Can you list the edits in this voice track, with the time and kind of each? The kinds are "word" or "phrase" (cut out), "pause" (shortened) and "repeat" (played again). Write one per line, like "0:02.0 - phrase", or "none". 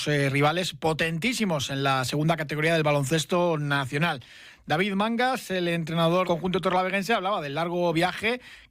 0:06.2 - word